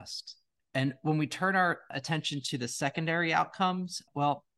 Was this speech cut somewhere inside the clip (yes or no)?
no